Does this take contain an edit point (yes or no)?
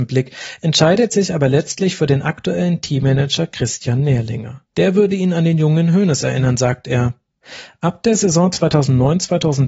yes